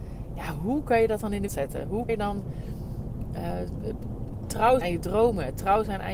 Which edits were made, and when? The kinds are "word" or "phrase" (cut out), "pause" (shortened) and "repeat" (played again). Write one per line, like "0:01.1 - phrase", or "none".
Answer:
0:01.5 - word
0:02.1 - word
0:04.8 - word